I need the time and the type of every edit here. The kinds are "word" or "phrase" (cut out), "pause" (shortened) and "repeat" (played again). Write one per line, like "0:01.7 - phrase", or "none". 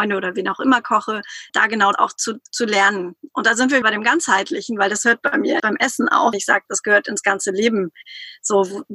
0:01.5 - word
0:01.9 - word
0:03.8 - word
0:05.6 - word
0:06.3 - word
0:06.7 - word